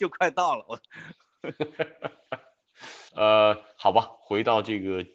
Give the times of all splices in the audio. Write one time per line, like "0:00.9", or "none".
0:03.1